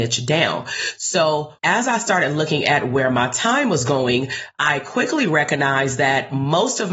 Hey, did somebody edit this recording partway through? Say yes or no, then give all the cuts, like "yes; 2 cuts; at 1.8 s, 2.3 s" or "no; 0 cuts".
yes; 1 cut; at 1.6 s